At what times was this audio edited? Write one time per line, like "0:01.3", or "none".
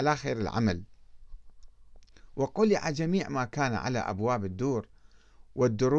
none